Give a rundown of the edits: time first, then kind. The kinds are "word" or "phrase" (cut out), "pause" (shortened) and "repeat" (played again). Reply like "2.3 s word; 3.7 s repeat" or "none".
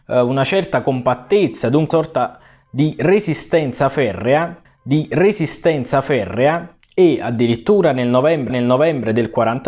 1.9 s word; 4.6 s repeat; 8.5 s repeat